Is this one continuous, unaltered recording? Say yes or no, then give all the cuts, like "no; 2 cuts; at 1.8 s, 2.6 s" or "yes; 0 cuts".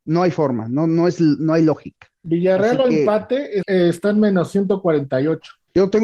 no; 2 cuts; at 2.1 s, 3.6 s